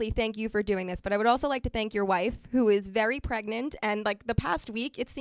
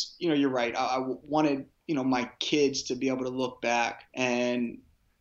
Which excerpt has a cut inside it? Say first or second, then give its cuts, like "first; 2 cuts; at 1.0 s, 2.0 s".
second; 2 cuts; at 1.8 s, 4.1 s